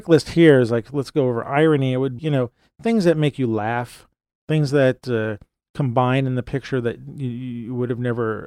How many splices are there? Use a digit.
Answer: 1